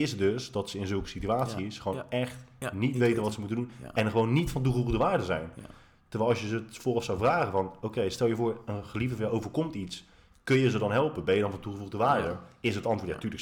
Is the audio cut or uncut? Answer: uncut